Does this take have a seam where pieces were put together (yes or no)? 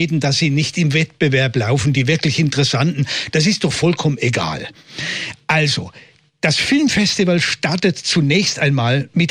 no